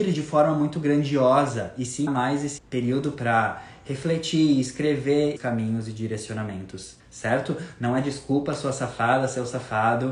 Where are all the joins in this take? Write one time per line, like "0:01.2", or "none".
0:02.1
0:02.6
0:05.4
0:07.0